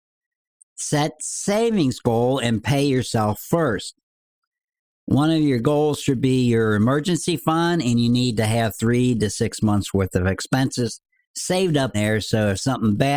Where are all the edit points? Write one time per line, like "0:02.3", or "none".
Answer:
0:11.9